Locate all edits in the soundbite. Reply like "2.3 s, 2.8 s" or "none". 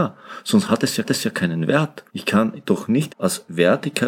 1.0 s, 2.1 s, 3.1 s

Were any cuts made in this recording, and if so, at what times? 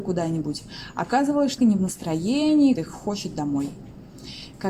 1.6 s, 2.8 s

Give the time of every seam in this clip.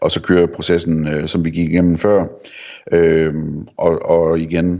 none

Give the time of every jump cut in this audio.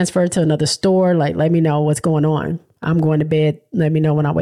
none

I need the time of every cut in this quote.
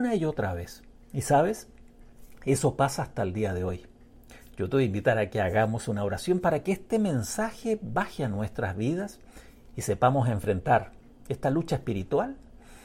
none

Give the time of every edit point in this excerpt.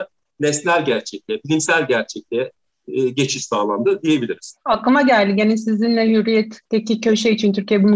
6.7 s

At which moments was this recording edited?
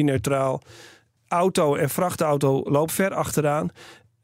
2.9 s

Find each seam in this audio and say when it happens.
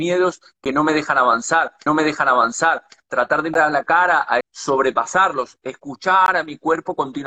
1.9 s, 3.5 s, 4.4 s

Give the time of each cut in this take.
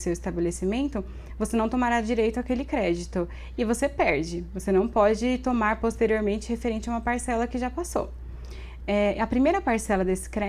none

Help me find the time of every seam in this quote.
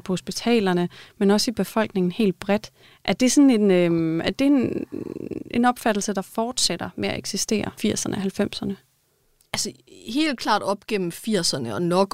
2.8 s, 7.8 s

